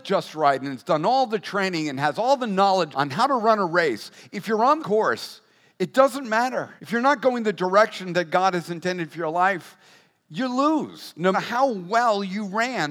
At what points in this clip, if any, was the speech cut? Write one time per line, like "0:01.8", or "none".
0:02.9
0:04.8
0:06.8
0:11.3